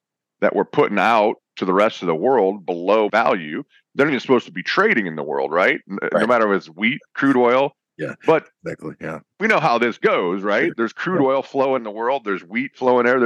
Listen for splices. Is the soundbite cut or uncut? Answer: cut